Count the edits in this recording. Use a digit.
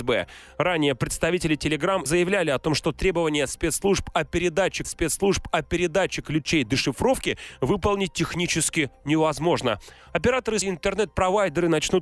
3